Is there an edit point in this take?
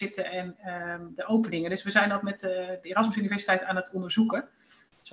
no; 0 cuts

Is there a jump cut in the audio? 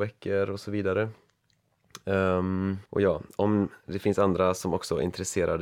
yes; 1 cut; at 2.9 s

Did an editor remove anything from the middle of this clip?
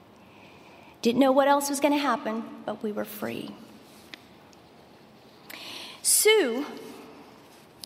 no; 0 cuts

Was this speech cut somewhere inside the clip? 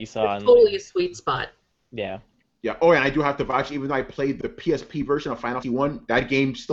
yes; 2 cuts; at 4.4 s, 5.6 s

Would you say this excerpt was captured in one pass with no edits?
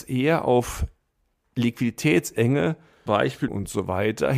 no; 2 cuts; at 3.1 s, 3.5 s

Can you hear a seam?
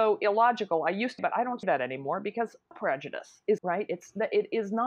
yes; 4 cuts; at 1.2 s, 1.6 s, 2.7 s, 3.6 s

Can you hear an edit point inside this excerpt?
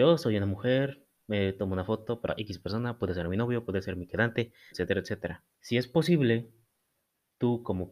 yes; 3 cuts; at 2.3 s, 4.7 s, 5.5 s

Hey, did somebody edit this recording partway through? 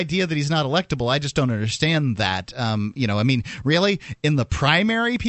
no; 0 cuts

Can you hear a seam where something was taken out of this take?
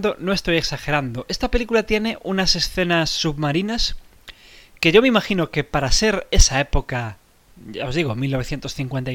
no; 0 cuts

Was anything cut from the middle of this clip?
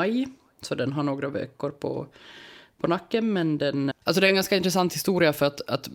yes; 1 cut; at 3.9 s

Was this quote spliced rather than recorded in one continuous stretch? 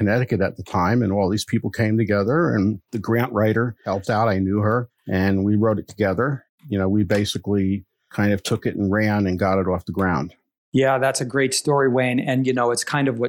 no; 0 cuts

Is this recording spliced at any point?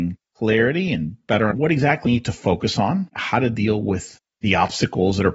yes; 3 cuts; at 1.5 s, 2.1 s, 3.1 s

